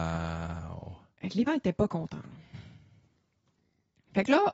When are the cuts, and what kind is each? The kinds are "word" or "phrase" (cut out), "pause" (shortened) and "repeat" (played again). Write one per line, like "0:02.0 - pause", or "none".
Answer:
0:01.5 - word